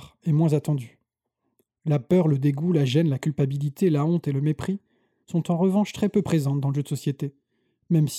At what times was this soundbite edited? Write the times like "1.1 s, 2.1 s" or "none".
none